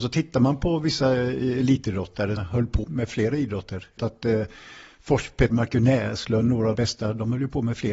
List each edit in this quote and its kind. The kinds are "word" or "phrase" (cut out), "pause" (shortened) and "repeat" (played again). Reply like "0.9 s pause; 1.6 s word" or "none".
2.4 s word; 2.8 s word; 4.0 s word; 5.5 s word; 6.7 s word